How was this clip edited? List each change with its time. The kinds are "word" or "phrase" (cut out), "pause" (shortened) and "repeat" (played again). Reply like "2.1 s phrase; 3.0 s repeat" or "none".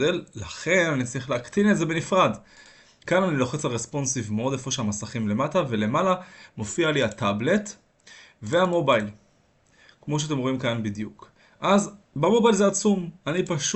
none